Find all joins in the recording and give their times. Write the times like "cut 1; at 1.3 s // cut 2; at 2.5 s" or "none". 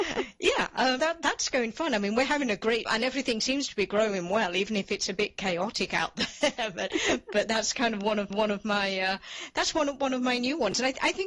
cut 1; at 1.0 s // cut 2; at 1.7 s // cut 3; at 2.9 s // cut 4; at 8.3 s